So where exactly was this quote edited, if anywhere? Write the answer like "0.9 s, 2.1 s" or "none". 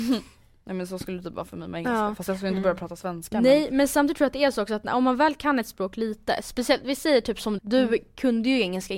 7.6 s